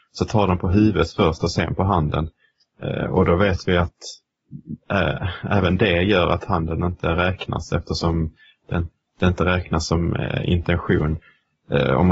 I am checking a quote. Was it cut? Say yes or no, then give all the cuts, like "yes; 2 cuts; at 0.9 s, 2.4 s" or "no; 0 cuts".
no; 0 cuts